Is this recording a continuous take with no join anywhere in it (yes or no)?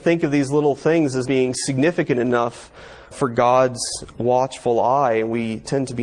no